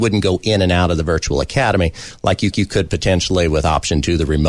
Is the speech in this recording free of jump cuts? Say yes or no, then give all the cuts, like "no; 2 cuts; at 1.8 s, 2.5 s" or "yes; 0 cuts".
no; 1 cut; at 2.5 s